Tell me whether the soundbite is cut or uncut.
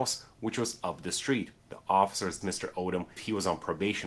cut